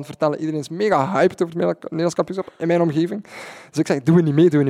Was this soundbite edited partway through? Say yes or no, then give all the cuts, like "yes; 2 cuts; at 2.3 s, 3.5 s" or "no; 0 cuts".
no; 0 cuts